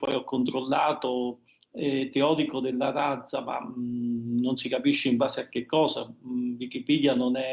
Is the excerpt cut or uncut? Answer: uncut